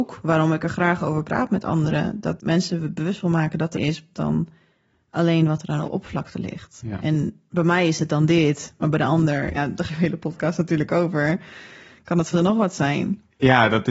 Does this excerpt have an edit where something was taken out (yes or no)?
yes